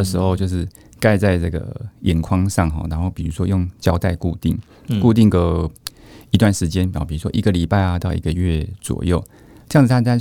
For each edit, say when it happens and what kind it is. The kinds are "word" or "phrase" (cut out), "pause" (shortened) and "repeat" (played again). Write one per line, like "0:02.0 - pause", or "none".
none